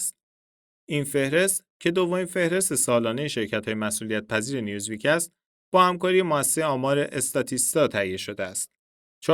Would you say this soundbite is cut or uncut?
uncut